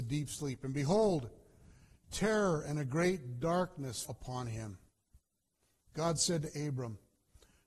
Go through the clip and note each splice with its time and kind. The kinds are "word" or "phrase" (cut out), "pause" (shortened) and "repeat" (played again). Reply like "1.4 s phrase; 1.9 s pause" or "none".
4.0 s word